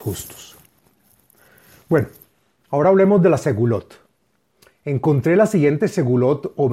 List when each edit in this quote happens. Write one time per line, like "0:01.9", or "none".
none